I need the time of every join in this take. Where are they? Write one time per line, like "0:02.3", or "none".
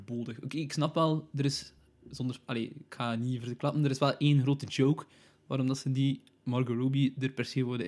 none